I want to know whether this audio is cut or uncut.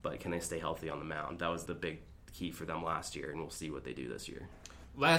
cut